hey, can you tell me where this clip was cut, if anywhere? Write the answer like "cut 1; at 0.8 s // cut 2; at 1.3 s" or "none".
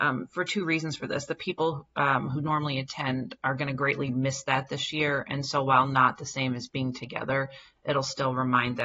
none